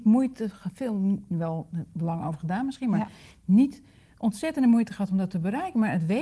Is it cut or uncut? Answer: uncut